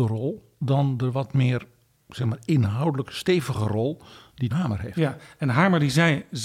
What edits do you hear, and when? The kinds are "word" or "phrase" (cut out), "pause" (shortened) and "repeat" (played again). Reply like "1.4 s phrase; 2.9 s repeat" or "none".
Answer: 4.5 s word